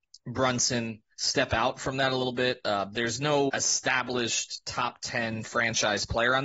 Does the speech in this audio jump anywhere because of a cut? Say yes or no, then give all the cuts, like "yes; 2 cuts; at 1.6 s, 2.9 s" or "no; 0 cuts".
yes; 2 cuts; at 1.1 s, 3.5 s